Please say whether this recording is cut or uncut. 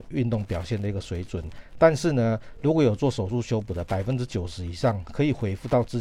uncut